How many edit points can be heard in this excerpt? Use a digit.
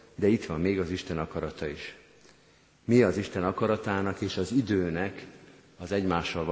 0